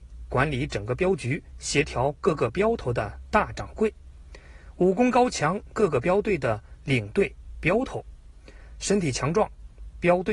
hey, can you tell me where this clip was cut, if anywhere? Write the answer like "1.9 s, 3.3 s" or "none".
5.7 s